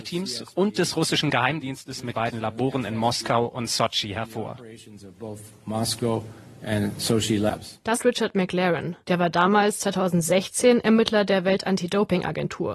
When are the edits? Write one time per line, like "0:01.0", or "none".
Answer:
0:02.1
0:08.0
0:09.0